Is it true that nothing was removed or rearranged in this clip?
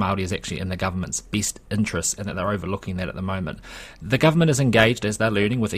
yes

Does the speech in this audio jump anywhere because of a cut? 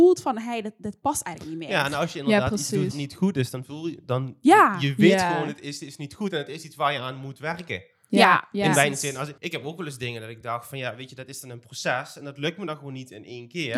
yes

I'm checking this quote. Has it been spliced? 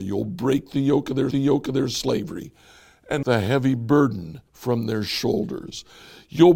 yes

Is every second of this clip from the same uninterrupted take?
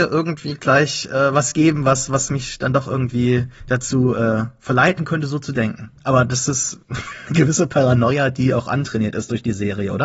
no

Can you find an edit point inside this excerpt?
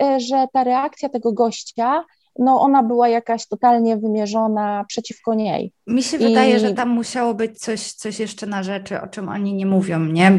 no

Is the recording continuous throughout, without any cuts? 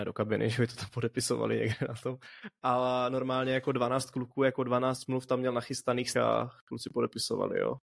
no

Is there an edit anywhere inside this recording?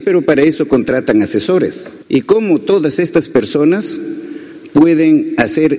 yes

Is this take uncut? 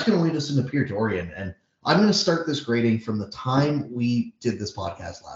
yes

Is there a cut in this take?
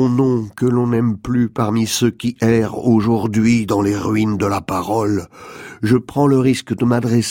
no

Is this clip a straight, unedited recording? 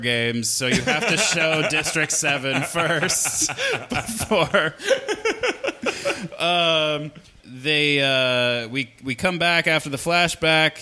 yes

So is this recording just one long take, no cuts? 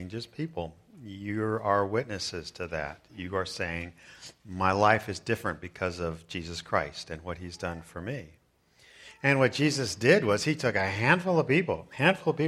yes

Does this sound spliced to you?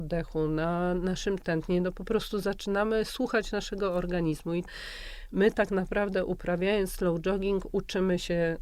no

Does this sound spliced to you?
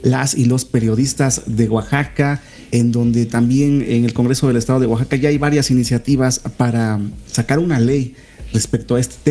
no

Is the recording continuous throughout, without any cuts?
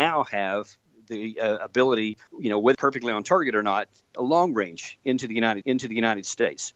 no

